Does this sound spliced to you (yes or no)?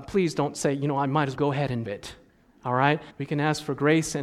yes